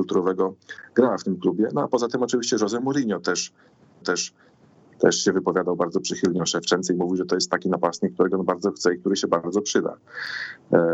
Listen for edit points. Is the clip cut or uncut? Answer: cut